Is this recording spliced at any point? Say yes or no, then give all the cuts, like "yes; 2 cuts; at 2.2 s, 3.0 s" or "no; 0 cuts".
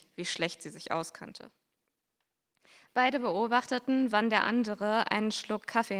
no; 0 cuts